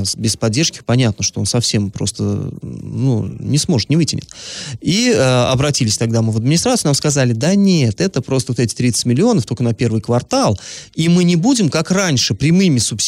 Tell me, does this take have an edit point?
no; 0 cuts

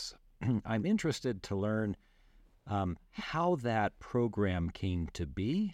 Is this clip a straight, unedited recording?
yes; 0 cuts

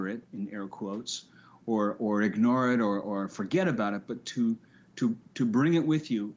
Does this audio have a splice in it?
no; 0 cuts

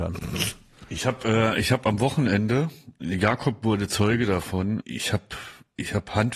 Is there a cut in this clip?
yes; 1 cut; at 4.8 s

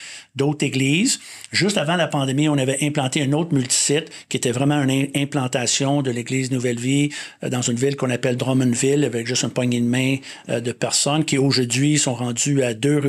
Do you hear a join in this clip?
no; 0 cuts

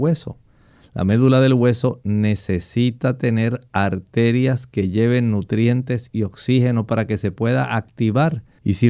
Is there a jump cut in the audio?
no; 0 cuts

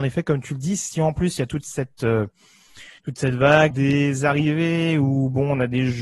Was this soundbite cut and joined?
yes; 2 cuts; at 3.0 s, 3.7 s

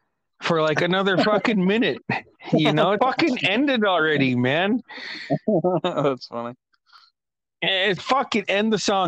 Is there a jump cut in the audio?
yes; 2 cuts; at 3.0 s, 8.0 s

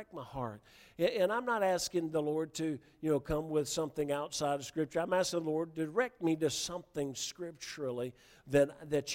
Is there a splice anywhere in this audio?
no; 0 cuts

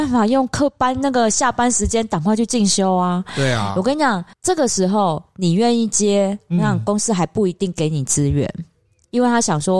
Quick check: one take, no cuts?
no; 1 cut; at 4.3 s

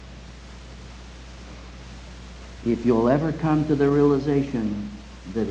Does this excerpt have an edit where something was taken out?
no; 0 cuts

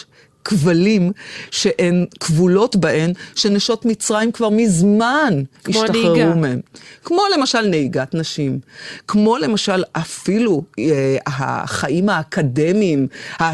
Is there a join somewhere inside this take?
no; 0 cuts

